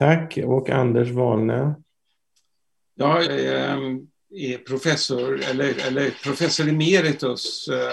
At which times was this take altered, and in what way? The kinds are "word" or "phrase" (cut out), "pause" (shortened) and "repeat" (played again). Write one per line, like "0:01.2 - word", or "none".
0:03.2 - word
0:05.7 - repeat